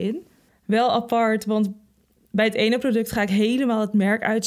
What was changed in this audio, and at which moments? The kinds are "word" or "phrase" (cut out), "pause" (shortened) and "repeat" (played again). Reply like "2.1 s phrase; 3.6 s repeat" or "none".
none